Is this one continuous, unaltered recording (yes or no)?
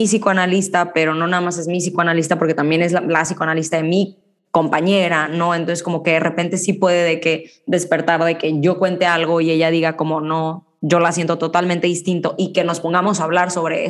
yes